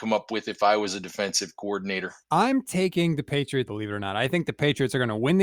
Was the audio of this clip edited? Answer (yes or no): yes